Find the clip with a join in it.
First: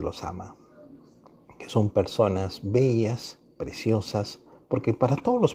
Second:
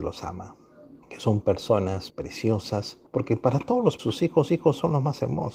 second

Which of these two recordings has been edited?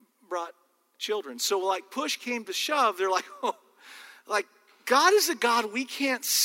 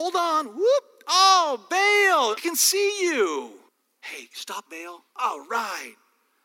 second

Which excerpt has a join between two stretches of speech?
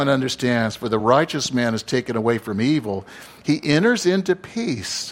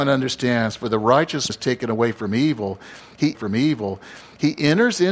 second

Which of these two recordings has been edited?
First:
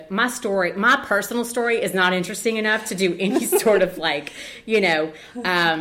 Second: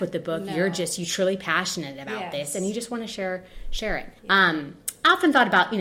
second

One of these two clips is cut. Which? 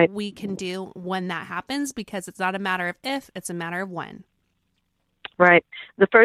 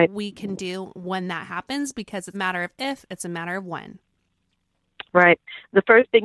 second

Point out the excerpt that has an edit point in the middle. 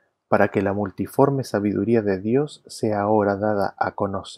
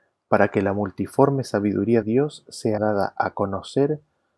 second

